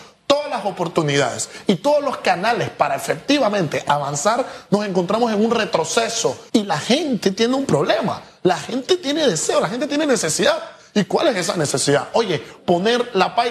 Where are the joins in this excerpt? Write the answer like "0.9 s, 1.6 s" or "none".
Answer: 6.5 s